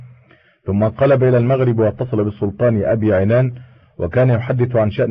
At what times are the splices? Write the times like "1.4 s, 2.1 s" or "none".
none